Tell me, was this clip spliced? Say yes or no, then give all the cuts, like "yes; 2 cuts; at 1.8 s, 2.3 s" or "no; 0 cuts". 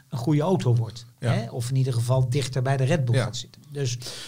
no; 0 cuts